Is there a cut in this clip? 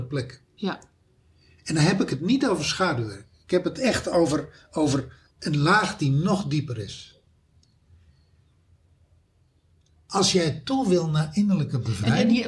yes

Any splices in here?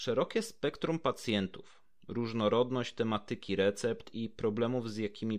no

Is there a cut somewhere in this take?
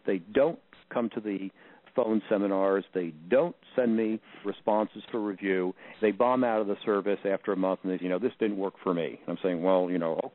yes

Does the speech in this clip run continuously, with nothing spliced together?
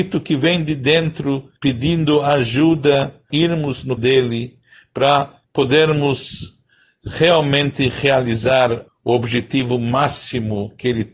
no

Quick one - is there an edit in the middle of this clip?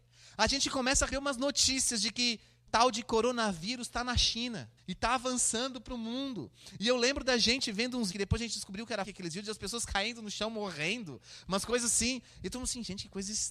yes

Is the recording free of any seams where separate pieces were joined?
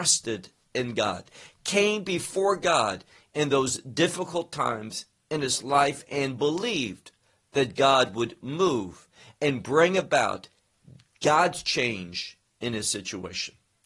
yes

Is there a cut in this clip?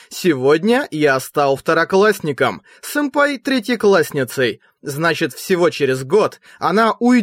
no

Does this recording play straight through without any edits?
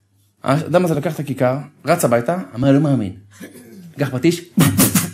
yes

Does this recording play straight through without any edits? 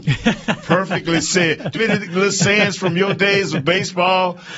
no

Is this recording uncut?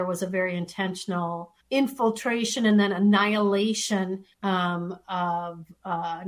no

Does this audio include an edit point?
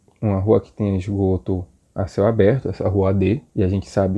no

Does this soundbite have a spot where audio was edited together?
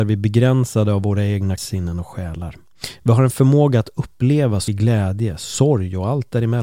yes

